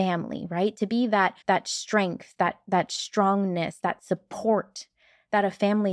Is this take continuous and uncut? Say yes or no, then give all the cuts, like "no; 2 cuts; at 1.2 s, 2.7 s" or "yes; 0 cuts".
no; 1 cut; at 1.4 s